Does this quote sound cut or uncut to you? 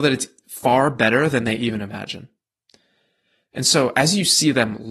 uncut